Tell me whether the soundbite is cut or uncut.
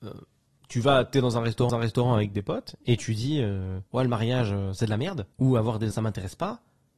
cut